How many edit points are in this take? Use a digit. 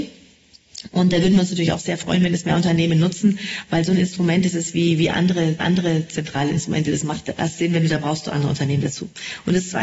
2